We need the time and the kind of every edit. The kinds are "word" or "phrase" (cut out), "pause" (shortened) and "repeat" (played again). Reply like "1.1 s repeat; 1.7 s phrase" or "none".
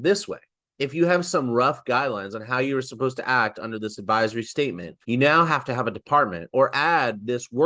5.0 s pause